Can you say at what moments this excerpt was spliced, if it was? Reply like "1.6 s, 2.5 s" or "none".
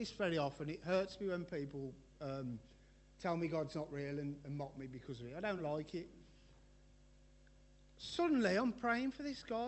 none